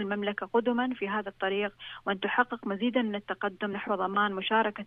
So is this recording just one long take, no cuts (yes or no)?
yes